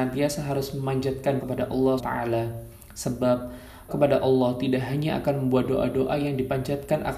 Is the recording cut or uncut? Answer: cut